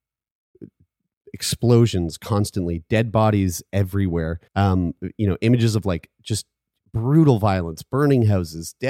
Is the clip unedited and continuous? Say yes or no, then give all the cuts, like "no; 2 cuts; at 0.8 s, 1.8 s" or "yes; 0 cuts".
no; 1 cut; at 4.5 s